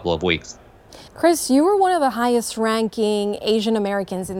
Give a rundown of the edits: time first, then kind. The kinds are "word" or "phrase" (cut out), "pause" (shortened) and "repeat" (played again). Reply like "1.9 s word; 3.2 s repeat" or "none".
1.1 s pause